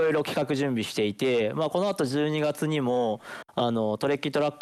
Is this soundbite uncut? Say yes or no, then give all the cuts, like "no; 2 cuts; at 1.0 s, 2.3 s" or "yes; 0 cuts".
yes; 0 cuts